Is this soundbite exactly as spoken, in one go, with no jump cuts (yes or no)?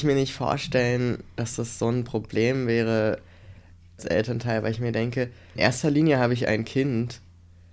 no